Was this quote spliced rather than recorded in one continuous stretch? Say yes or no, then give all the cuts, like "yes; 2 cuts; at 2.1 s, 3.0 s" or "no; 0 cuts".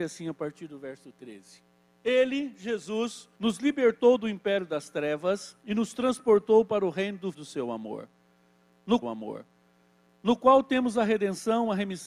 yes; 4 cuts; at 3.4 s, 5.6 s, 7.3 s, 9.0 s